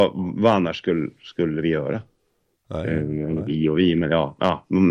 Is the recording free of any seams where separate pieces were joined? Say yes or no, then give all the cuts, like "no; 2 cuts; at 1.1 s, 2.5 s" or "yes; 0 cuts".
yes; 0 cuts